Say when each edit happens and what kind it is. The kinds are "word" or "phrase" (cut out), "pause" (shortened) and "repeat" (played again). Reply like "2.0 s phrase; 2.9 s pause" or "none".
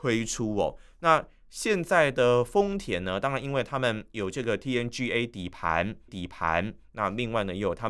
6.1 s repeat